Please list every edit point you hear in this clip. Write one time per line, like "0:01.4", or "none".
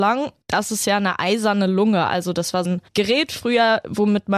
0:02.6